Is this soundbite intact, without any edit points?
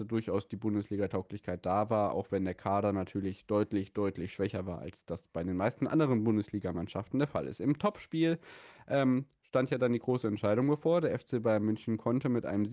yes; 0 cuts

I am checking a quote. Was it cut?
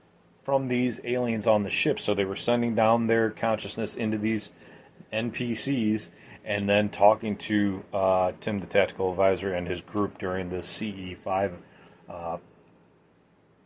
no; 0 cuts

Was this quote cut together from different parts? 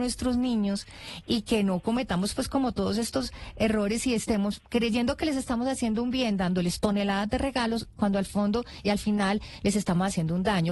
no; 0 cuts

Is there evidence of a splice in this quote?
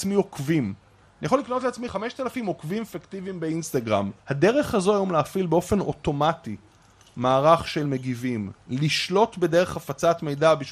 no; 0 cuts

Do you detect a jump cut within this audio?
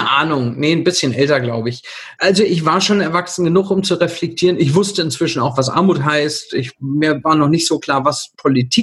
no; 0 cuts

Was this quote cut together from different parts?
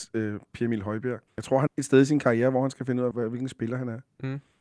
yes; 3 cuts; at 1.3 s, 1.7 s, 3.1 s

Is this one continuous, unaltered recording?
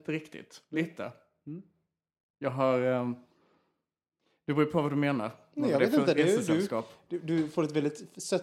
yes; 0 cuts

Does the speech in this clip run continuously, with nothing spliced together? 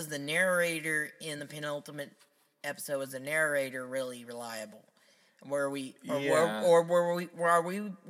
yes; 0 cuts

